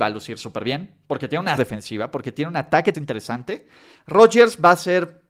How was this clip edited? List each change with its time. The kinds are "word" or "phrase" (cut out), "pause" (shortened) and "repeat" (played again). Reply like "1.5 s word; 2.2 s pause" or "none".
1.6 s word; 2.9 s word